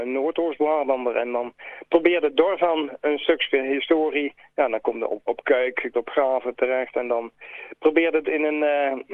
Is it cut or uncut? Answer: cut